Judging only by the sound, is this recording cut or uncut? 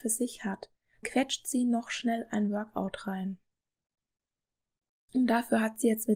cut